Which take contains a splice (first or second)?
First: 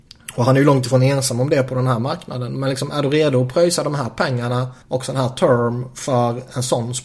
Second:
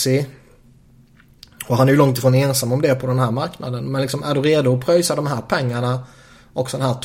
first